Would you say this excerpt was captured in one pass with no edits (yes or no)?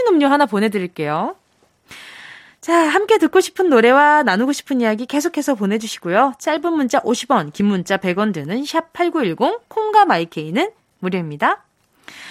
yes